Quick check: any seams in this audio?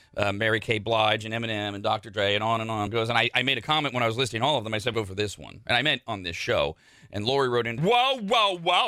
yes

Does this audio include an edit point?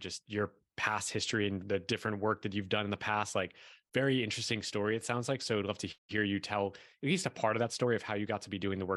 yes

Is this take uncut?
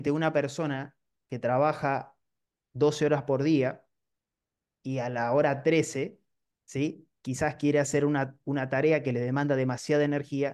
no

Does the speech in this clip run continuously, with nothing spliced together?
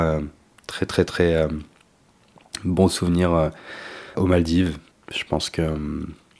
no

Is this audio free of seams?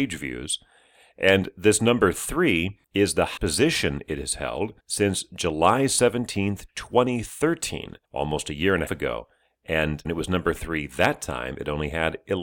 no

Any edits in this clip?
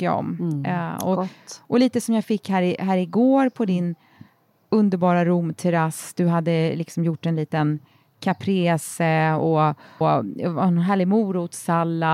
yes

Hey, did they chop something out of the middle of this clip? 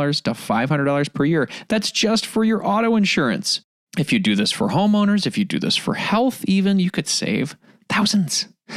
no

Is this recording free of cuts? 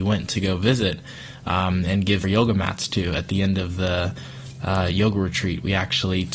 no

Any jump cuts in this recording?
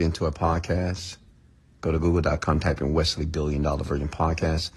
no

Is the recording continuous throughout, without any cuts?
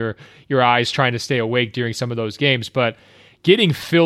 yes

